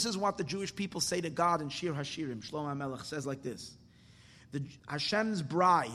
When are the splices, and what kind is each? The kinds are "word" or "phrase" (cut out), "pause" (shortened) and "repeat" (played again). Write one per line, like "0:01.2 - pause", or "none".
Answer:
0:04.8 - pause